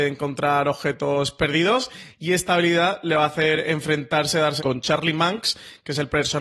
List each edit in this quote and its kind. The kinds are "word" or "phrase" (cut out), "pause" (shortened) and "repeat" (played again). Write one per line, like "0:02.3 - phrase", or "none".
0:04.6 - word

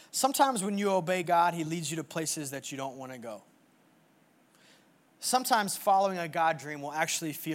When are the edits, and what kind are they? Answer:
none

